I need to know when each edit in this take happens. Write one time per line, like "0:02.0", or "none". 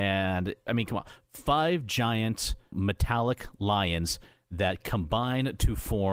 none